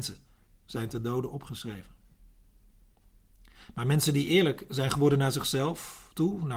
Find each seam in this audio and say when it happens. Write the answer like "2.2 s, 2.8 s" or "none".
none